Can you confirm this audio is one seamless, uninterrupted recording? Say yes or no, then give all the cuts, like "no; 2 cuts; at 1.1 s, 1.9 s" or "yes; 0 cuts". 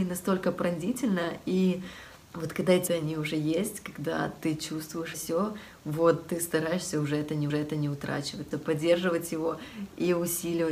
no; 5 cuts; at 2.2 s, 2.9 s, 5.1 s, 7.5 s, 8.5 s